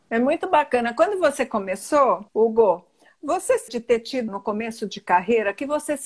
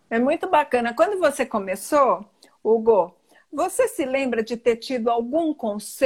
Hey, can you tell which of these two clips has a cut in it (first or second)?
first